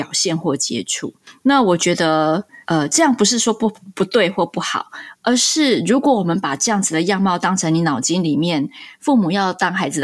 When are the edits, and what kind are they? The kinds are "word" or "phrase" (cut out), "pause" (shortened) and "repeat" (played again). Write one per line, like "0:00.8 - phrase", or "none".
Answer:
0:02.6 - pause